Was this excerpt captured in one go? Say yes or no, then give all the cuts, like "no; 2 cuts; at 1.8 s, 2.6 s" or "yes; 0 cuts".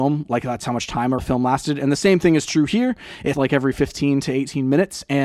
no; 2 cuts; at 1.2 s, 3.3 s